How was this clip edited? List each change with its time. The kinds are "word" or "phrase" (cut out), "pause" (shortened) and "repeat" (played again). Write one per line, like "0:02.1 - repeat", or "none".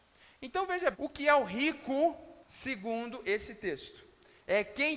0:00.9 - word
0:02.4 - pause

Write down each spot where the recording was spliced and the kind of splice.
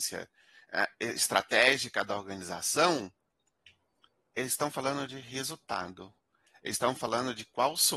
none

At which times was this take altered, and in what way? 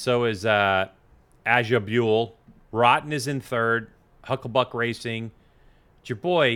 none

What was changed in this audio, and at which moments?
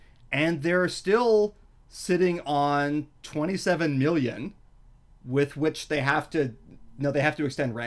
none

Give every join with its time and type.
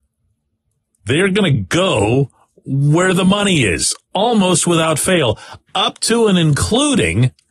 none

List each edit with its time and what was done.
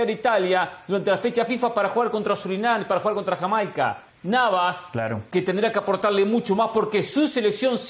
0:04.1 - pause

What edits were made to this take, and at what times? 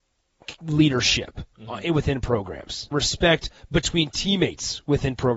0:02.9 - word

